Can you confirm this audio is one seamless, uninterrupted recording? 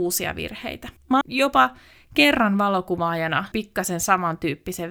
no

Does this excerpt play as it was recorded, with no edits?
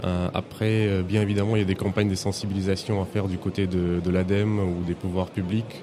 yes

